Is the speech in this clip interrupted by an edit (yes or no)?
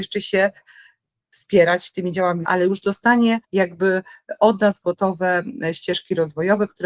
yes